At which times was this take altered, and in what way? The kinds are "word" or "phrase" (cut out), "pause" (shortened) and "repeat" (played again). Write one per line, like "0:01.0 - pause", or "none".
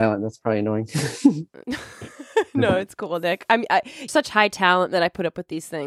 0:04.1 - word